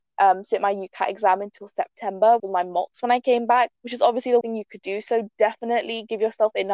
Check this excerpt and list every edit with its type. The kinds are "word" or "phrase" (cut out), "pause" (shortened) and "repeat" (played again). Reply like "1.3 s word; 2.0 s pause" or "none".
2.4 s phrase; 3.8 s pause; 4.4 s word

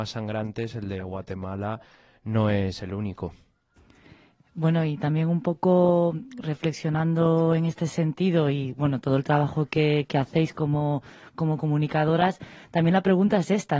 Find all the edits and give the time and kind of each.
none

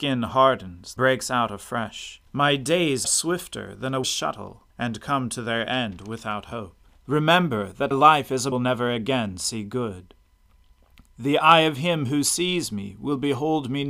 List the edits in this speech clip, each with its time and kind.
1.0 s word; 2.3 s pause; 3.0 s word; 4.0 s word; 4.7 s pause; 6.9 s pause; 7.9 s word; 8.5 s phrase

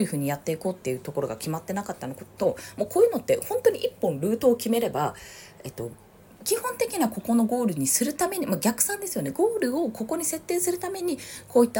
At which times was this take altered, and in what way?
none

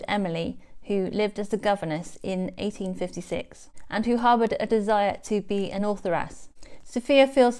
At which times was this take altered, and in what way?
none

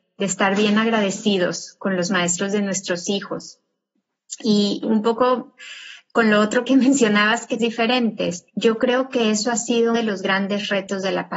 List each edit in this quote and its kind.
4.8 s word; 6.6 s word; 7.6 s phrase; 8.5 s pause; 9.9 s word

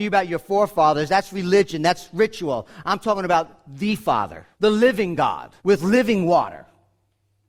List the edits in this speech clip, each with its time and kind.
4.5 s pause; 5.6 s pause

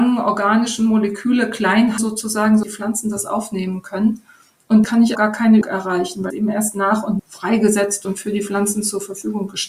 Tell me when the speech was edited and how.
2.0 s word; 2.6 s word; 4.8 s word; 5.2 s word; 5.6 s word; 6.3 s word; 7.2 s word; 8.0 s word

